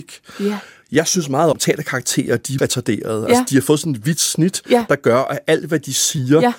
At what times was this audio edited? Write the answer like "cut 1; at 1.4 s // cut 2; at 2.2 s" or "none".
cut 1; at 1.5 s // cut 2; at 2.6 s